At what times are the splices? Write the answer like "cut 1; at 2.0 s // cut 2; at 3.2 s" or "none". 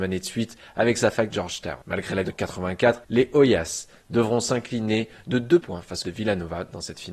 cut 1; at 1.3 s // cut 2; at 1.8 s // cut 3; at 2.2 s // cut 4; at 3.0 s // cut 5; at 5.6 s // cut 6; at 6.0 s